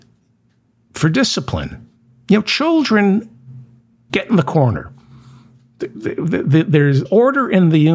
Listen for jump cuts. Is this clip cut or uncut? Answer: cut